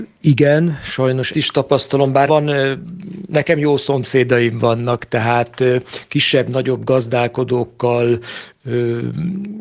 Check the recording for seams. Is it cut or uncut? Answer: cut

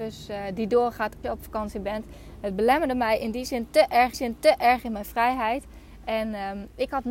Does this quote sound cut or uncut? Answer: cut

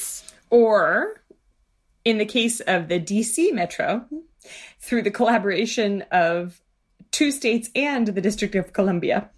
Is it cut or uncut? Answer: uncut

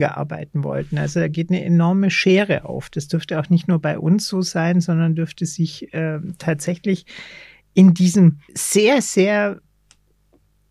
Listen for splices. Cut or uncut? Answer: cut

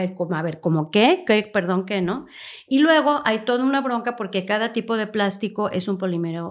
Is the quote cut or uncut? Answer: uncut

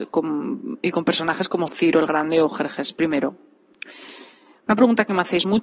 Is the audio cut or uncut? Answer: uncut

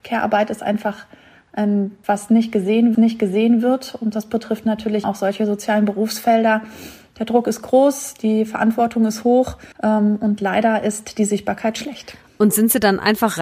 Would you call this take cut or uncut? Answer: cut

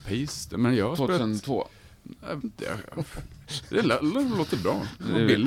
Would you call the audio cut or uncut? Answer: cut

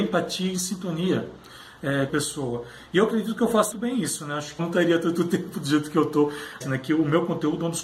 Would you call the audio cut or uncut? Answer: cut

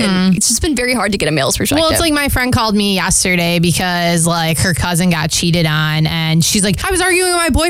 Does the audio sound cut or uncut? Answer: uncut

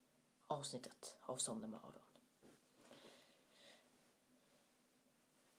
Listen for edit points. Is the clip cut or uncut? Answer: uncut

